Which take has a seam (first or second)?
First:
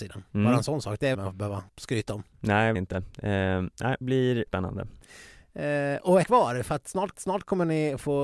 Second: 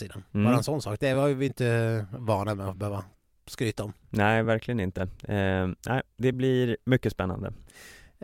first